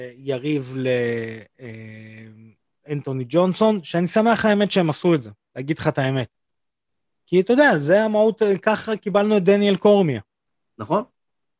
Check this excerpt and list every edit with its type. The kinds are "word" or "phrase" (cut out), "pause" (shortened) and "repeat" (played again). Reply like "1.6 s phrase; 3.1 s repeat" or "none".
none